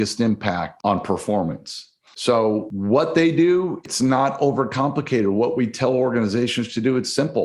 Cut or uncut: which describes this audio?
uncut